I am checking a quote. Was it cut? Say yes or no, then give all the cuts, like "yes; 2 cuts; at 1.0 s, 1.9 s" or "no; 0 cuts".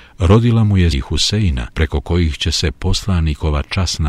yes; 2 cuts; at 0.9 s, 1.7 s